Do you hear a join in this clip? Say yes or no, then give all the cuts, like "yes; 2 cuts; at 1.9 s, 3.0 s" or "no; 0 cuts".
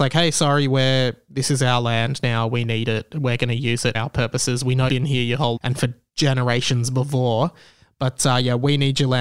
yes; 3 cuts; at 3.9 s, 4.9 s, 5.6 s